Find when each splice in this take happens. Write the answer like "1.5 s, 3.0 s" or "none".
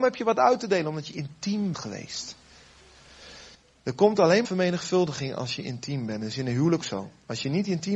1.7 s, 3.5 s, 4.4 s, 6.8 s